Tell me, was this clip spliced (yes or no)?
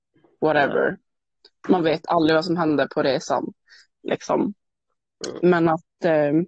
no